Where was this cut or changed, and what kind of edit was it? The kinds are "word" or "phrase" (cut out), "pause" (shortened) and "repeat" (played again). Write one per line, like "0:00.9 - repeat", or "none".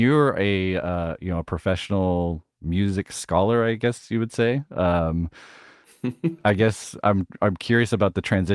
none